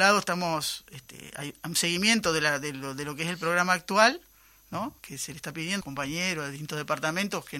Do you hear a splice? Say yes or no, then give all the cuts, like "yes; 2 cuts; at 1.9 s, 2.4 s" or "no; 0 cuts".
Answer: yes; 2 cuts; at 5.0 s, 5.8 s